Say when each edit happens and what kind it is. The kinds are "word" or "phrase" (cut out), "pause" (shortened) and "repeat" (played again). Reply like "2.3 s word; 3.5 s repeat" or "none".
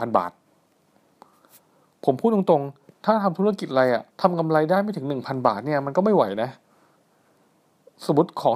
4.1 s pause